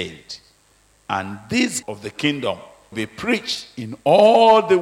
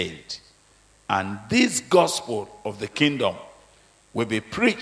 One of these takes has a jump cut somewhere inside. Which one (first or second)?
first